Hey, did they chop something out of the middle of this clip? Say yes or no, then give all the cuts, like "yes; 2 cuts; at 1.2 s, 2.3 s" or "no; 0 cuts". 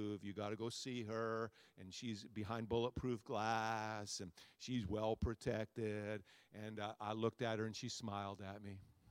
no; 0 cuts